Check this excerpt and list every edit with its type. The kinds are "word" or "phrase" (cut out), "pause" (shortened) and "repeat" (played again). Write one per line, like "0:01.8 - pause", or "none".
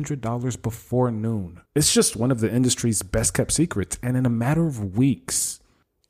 0:01.7 - pause